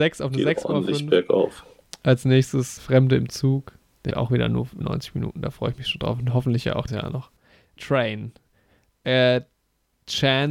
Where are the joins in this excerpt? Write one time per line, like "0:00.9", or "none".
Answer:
0:02.8
0:04.1
0:04.8
0:06.9
0:07.8

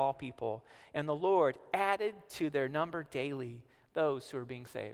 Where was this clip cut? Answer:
none

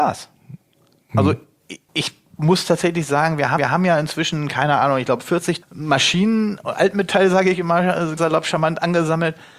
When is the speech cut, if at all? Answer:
0:01.9
0:03.6
0:05.6
0:08.2

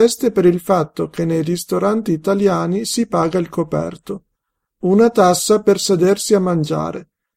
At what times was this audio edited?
none

